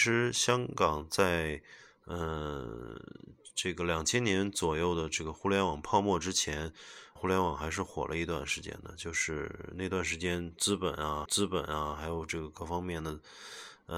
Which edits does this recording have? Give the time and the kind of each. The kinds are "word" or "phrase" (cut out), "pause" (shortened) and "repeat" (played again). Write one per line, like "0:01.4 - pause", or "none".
0:07.2 - word
0:11.3 - repeat

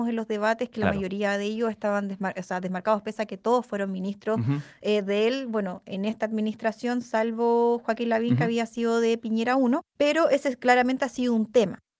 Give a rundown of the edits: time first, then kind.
0:09.9 - pause

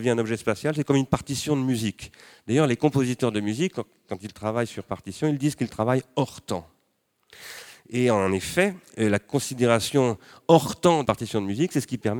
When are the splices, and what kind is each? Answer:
0:11.0 - word

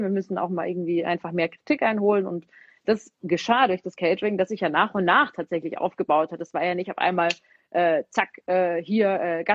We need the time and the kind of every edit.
none

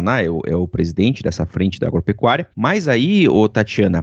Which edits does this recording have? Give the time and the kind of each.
0:02.5 - pause

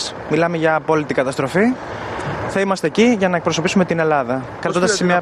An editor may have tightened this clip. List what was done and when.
none

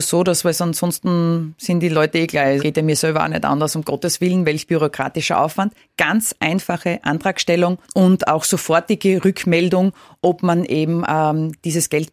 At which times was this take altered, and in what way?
0:02.6 - word
0:07.8 - pause

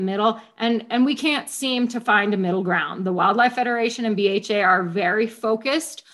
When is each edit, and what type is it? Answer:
none

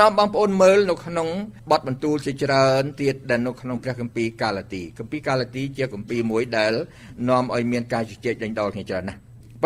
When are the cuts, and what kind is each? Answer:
0:01.6 - pause

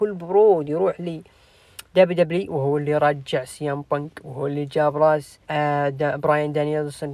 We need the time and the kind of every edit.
0:05.4 - pause

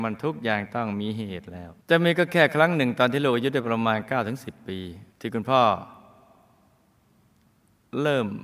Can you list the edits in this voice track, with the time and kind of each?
0:01.8 - pause
0:05.1 - pause

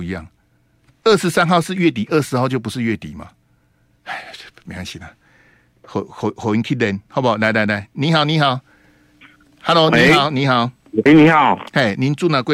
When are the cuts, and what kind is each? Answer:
0:11.1 - word

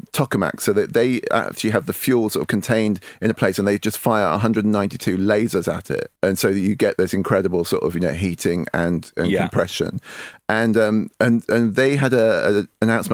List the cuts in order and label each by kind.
0:06.2 - pause

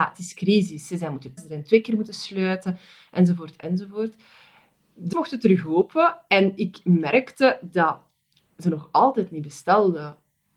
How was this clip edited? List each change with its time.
0:01.4 - word
0:05.1 - word

